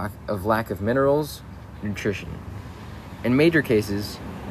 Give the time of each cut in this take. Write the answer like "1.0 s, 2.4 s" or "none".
1.7 s